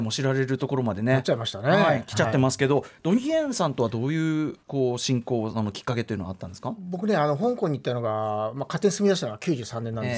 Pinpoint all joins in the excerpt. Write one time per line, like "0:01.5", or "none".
0:04.6